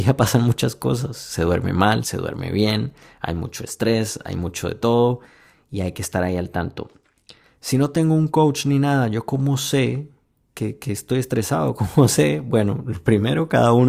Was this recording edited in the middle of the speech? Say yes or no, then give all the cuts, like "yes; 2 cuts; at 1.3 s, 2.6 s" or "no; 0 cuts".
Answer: no; 0 cuts